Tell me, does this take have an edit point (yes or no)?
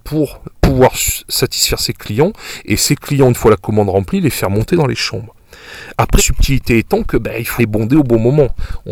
yes